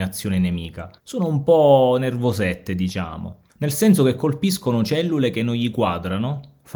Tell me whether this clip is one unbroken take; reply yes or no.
no